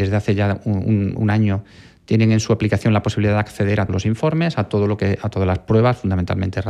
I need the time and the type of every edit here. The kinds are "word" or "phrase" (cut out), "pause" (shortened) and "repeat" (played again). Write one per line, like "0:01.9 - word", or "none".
0:03.9 - word